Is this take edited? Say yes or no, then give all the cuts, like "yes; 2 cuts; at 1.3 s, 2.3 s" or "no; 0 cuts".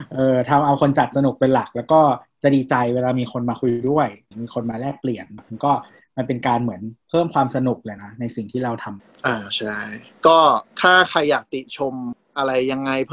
yes; 1 cut; at 10.7 s